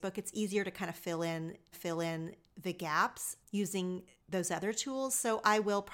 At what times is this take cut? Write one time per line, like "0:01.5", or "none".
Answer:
0:01.7
0:03.4

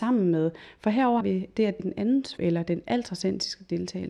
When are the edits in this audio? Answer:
0:01.2
0:01.8
0:02.4

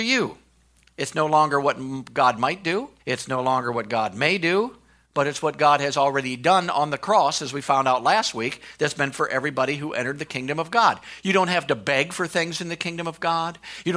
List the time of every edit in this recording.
0:03.0
0:09.1

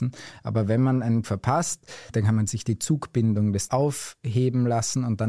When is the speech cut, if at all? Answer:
0:01.2
0:03.7

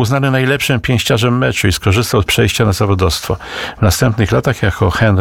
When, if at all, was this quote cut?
0:02.3

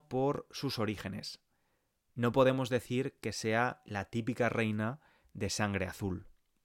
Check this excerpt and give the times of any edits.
none

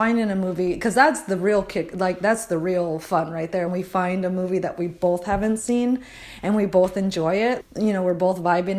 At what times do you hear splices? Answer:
0:03.7
0:07.6

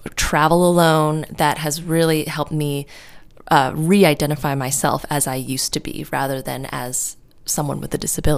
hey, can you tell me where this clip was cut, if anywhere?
none

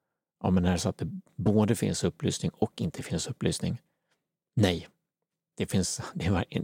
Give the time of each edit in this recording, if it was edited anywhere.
none

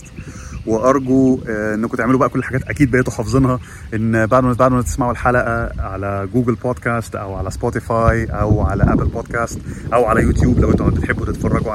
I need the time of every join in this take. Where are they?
0:02.6
0:04.6

